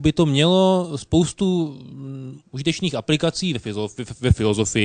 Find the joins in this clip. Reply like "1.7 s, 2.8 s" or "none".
2.4 s